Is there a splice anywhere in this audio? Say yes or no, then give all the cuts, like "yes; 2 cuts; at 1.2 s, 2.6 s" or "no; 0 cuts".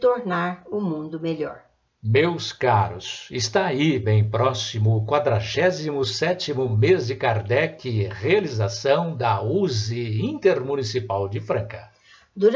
no; 0 cuts